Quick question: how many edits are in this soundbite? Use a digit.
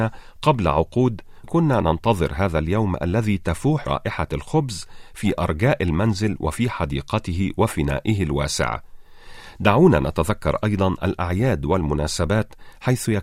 2